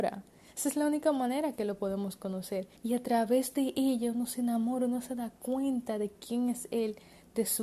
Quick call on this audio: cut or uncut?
cut